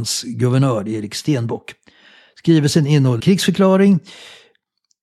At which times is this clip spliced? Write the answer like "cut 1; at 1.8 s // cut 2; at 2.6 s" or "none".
cut 1; at 3.2 s